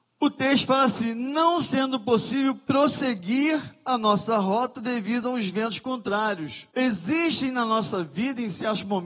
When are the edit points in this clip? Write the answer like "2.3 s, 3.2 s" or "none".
6.7 s